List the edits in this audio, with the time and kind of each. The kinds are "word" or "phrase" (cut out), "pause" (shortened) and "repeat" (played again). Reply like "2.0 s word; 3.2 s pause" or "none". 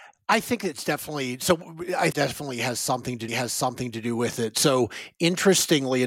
2.1 s phrase; 3.3 s repeat